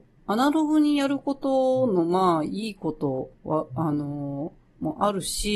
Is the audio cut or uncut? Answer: cut